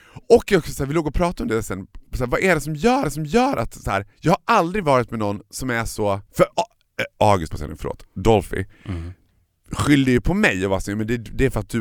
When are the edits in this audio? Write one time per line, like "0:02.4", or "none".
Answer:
0:02.1
0:03.0
0:04.1
0:06.3
0:07.5